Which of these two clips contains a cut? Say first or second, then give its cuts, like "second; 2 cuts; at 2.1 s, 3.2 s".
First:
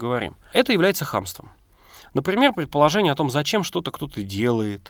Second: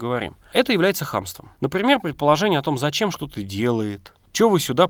second; 2 cuts; at 1.5 s, 3.1 s